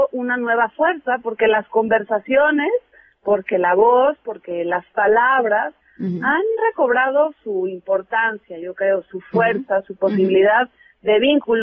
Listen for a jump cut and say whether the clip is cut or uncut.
uncut